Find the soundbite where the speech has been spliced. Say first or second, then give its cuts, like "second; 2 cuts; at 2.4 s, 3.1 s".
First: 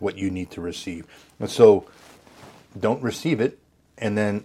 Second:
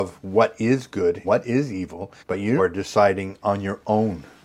second; 3 cuts; at 1.2 s, 2.2 s, 2.6 s